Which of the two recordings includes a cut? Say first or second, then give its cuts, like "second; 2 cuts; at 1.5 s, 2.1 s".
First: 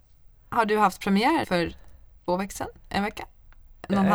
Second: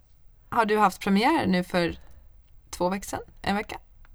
first; 2 cuts; at 1.4 s, 2.3 s